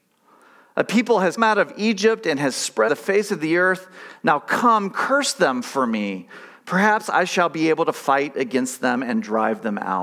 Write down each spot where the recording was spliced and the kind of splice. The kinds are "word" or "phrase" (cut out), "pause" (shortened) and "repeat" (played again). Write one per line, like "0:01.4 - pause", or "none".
0:01.4 - word
0:02.9 - word